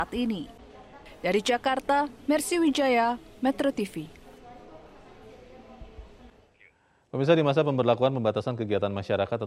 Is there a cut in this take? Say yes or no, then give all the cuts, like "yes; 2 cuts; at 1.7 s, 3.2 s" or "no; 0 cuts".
no; 0 cuts